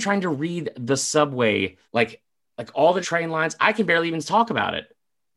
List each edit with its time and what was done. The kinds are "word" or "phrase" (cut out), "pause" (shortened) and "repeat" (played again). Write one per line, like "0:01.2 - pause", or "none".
0:01.8 - pause
0:03.0 - word